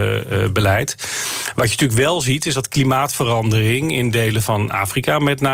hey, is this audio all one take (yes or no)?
yes